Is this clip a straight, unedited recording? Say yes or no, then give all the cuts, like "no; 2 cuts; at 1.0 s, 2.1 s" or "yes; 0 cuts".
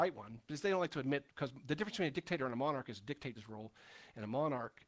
no; 2 cuts; at 1.3 s, 3.4 s